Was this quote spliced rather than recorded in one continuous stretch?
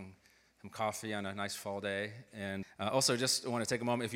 yes; 1 cut; at 2.6 s

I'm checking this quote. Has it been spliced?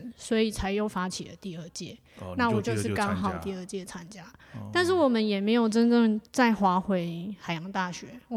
yes; 1 cut; at 6.3 s

